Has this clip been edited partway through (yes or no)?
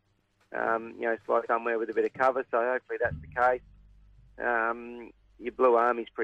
yes